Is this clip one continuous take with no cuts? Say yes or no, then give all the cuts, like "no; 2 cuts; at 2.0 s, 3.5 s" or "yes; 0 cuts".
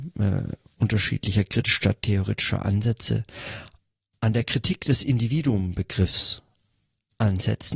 yes; 0 cuts